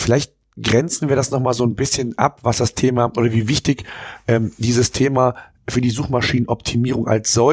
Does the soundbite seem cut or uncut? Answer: uncut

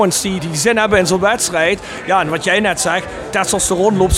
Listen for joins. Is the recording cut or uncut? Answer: uncut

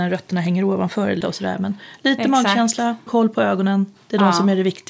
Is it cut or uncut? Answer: cut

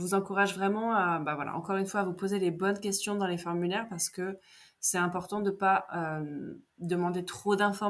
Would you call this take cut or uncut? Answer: cut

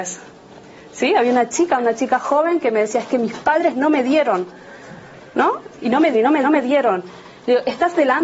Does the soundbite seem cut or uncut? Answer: cut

